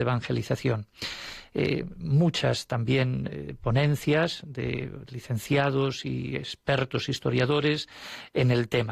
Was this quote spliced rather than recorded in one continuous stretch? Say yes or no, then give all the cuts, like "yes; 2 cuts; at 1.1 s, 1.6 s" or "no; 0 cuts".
no; 0 cuts